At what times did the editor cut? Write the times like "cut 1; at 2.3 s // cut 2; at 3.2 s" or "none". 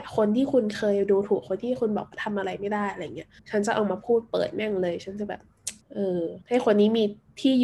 cut 1; at 3.4 s // cut 2; at 5.8 s // cut 3; at 6.4 s